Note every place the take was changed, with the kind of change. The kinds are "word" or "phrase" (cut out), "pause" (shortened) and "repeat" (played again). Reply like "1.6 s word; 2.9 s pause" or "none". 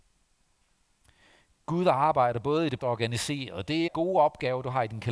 2.8 s word; 3.9 s word